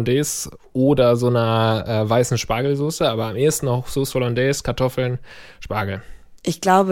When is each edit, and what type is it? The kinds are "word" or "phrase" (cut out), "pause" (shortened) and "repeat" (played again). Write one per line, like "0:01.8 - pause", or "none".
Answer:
none